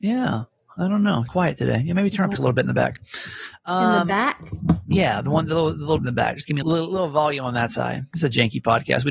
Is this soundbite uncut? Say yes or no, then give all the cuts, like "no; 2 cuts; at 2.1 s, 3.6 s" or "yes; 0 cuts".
no; 4 cuts; at 1.3 s, 2.3 s, 6.0 s, 6.6 s